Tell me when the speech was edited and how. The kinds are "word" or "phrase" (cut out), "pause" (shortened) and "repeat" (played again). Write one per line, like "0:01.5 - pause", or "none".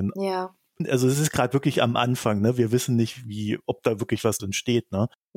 0:04.4 - word